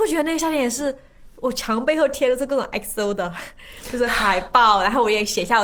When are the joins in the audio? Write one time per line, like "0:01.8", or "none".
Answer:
none